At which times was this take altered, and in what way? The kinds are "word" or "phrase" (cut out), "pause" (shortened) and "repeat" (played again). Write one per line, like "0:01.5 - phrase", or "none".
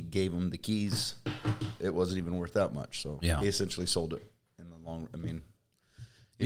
none

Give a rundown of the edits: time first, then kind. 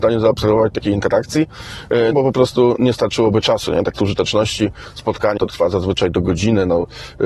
0:02.1 - word
0:04.0 - word
0:05.4 - word

